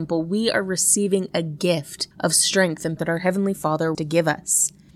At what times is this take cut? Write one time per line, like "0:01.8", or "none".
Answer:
0:02.1
0:03.0
0:03.9

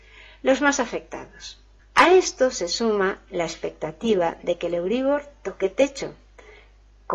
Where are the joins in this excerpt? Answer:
0:01.8

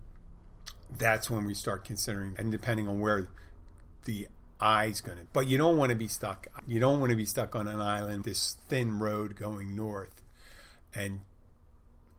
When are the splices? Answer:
0:02.4
0:05.3
0:06.6
0:08.2
0:08.6

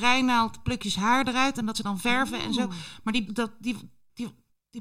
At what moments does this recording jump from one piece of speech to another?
0:01.7
0:03.3

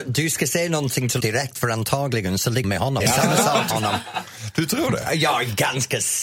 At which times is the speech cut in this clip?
0:01.2
0:02.6
0:03.0
0:03.7

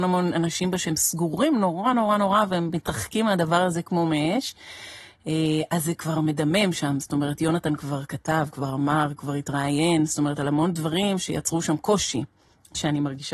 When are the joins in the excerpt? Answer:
none

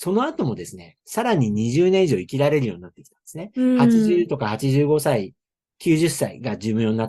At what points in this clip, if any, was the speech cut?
0:01.0

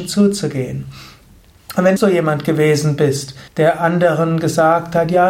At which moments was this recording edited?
0:02.0
0:03.5

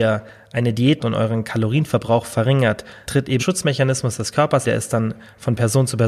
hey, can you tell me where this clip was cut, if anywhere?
0:01.0
0:03.0
0:03.4
0:04.6

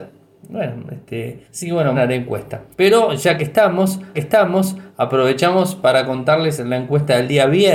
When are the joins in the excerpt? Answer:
0:01.4
0:01.9
0:02.7
0:04.1

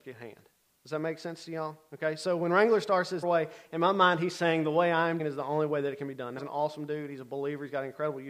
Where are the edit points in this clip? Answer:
0:03.2
0:05.2
0:06.4

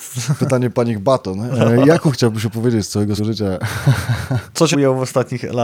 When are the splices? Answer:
0:02.1
0:03.2
0:04.7

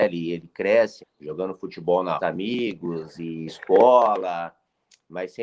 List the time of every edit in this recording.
0:01.0
0:02.2
0:03.5

